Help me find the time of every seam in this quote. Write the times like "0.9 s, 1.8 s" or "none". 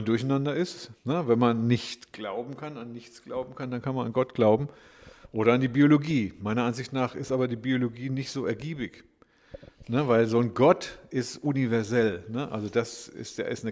1.0 s